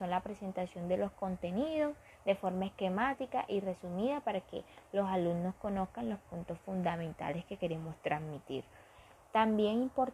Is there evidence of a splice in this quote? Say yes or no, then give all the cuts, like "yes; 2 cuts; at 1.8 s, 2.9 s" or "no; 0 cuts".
no; 0 cuts